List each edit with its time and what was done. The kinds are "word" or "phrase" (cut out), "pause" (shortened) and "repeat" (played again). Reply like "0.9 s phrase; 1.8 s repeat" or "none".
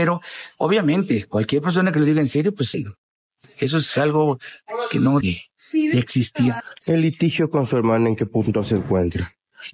2.7 s phrase; 5.2 s word